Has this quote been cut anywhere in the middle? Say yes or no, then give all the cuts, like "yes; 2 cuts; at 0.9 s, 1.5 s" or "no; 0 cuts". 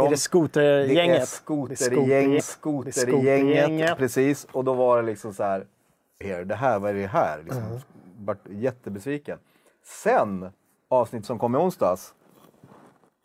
yes; 3 cuts; at 2.4 s, 6.2 s, 11.2 s